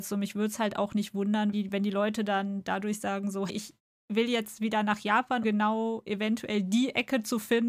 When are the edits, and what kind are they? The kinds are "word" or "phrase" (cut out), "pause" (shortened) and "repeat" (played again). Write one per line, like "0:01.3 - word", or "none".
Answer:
0:01.5 - word
0:03.5 - word
0:05.4 - word